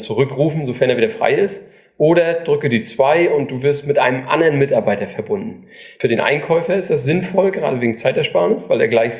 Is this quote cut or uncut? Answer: uncut